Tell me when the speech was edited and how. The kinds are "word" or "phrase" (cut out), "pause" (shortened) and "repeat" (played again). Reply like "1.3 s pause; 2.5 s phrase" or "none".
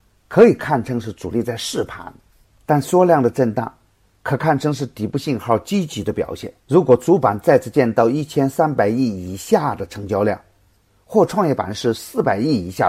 6.6 s pause